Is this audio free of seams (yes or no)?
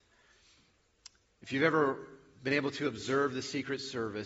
yes